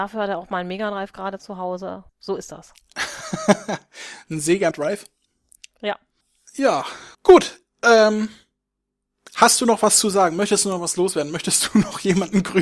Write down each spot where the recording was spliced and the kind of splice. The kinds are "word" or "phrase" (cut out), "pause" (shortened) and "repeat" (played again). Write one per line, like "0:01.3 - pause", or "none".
0:02.1 - pause
0:04.7 - word
0:07.1 - pause